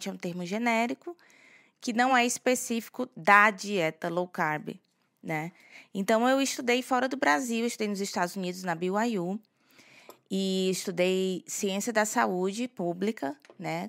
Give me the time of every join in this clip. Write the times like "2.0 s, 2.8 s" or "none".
none